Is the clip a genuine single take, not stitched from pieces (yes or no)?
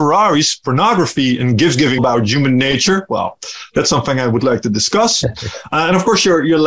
no